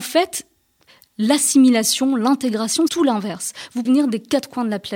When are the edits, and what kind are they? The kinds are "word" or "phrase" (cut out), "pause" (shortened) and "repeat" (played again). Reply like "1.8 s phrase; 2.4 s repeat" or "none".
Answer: 2.9 s word; 3.8 s word